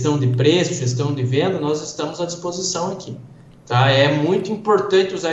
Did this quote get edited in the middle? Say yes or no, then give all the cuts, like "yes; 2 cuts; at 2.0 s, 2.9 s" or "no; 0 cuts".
no; 0 cuts